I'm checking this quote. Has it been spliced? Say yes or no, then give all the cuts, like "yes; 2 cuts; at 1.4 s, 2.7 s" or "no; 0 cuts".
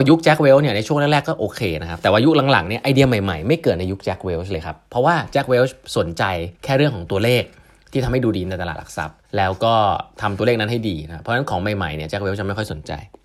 yes; 2 cuts; at 6.6 s, 9.3 s